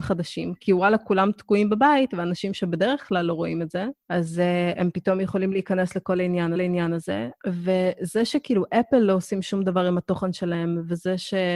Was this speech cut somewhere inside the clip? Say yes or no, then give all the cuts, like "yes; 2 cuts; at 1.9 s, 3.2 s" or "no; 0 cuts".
yes; 1 cut; at 6.6 s